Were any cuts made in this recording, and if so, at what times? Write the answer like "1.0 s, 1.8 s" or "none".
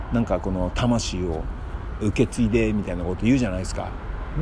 2.0 s